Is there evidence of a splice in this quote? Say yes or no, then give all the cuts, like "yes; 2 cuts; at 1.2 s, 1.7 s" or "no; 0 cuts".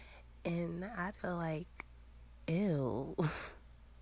yes; 1 cut; at 1.2 s